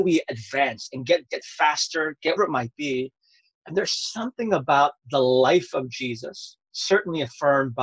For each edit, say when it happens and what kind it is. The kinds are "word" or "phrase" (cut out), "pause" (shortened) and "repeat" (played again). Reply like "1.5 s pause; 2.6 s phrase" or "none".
1.3 s word; 2.4 s word

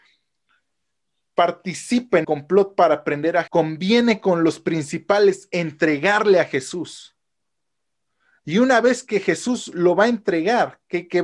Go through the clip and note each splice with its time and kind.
2.2 s word; 3.5 s word

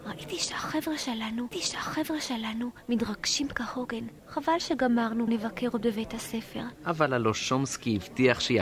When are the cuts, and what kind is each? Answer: 1.5 s repeat; 4.2 s pause; 5.3 s word; 6.8 s pause

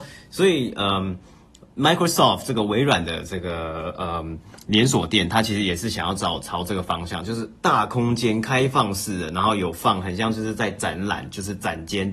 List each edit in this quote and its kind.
none

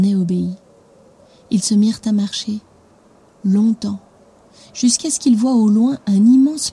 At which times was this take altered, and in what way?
none

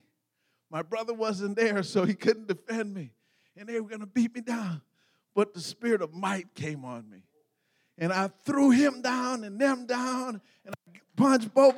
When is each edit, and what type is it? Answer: none

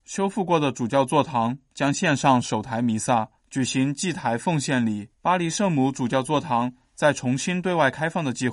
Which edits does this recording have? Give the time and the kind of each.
3.4 s pause; 5.1 s pause

